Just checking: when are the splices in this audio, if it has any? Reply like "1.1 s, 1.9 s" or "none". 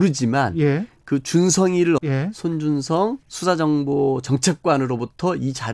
2.0 s, 3.2 s